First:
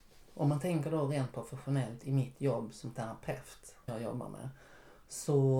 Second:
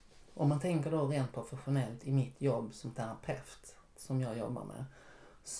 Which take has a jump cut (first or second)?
first